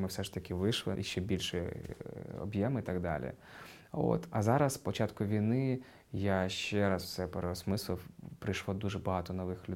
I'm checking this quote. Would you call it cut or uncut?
cut